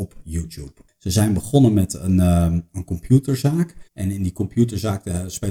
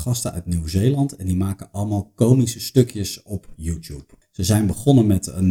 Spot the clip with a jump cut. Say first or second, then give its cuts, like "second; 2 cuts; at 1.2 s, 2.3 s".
first; 1 cut; at 3.8 s